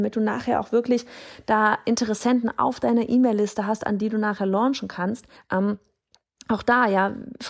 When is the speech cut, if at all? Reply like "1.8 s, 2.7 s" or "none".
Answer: 5.4 s